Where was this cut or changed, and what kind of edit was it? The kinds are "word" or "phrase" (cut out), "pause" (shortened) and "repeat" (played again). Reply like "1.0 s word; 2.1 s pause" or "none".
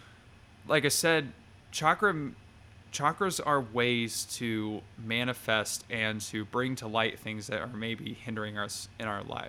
none